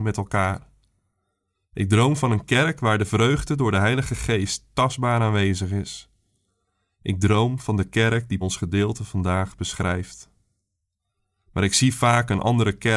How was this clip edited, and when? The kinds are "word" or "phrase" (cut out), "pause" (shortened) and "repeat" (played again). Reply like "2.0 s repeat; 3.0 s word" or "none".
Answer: 8.4 s phrase